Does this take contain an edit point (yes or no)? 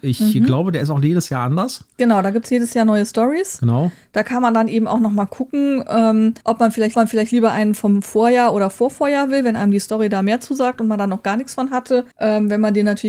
yes